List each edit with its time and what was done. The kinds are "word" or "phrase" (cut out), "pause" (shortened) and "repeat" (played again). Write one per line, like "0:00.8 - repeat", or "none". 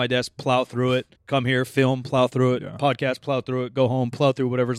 0:01.1 - pause